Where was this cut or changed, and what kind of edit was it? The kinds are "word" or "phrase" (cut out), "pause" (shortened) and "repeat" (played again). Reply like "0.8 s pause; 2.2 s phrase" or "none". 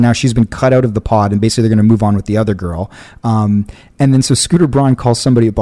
none